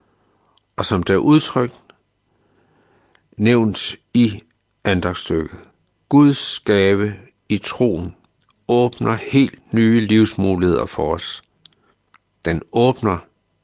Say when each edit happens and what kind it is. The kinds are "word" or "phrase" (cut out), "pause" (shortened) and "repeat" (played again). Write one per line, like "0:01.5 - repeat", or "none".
0:05.7 - pause

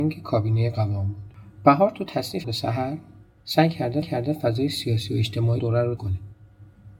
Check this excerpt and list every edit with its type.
0:02.4 - word
0:04.0 - repeat
0:05.6 - word
0:06.0 - word

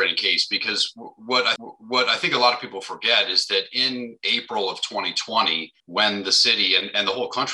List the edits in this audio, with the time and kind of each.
0:01.6 - repeat
0:05.8 - pause

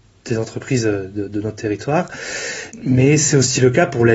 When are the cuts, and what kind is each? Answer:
none

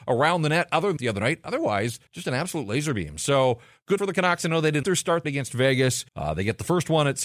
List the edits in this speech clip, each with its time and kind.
0:01.0 - phrase
0:02.1 - pause
0:04.0 - word
0:04.8 - word
0:05.2 - phrase
0:06.1 - pause

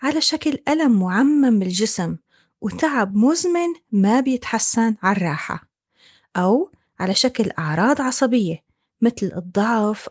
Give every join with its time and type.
none

